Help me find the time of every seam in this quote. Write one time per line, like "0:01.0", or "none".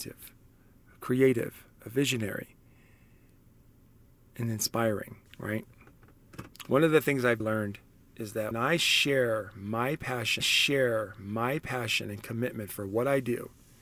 0:05.3
0:07.4
0:08.5
0:10.4